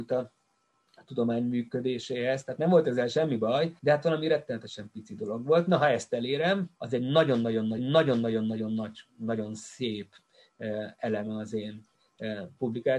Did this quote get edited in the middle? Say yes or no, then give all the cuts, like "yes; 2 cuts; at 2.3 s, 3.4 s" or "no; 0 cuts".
yes; 3 cuts; at 3.8 s, 6.8 s, 7.8 s